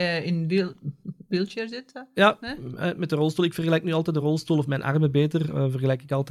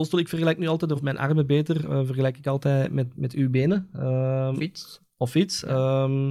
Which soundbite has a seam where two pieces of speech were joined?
second; 3 cuts; at 1.0 s, 3.1 s, 4.5 s

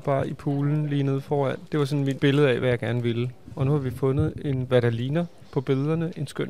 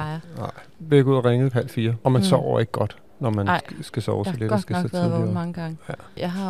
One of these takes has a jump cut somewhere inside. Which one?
second; 1 cut; at 1.5 s

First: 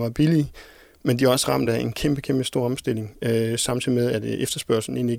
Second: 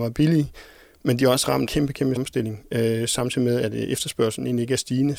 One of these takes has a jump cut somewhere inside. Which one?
second; 2 cuts; at 1.7 s, 2.2 s

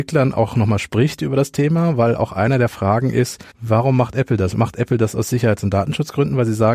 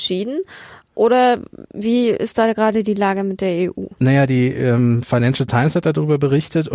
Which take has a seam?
first; 1 cut; at 3.5 s

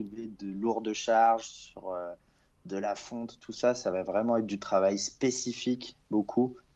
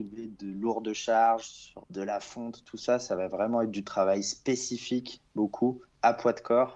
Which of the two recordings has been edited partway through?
second; 1 cut; at 1.8 s

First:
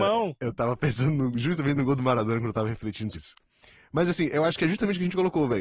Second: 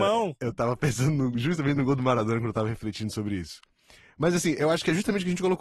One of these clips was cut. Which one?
first; 1 cut; at 3.1 s

